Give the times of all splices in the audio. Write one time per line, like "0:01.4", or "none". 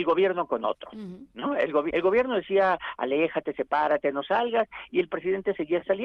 0:01.9